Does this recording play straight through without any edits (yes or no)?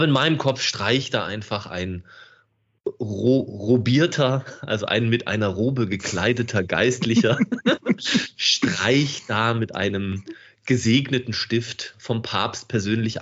yes